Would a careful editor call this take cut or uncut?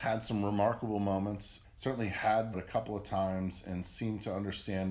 cut